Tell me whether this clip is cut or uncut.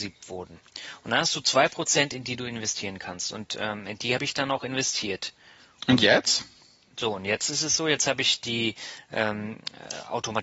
uncut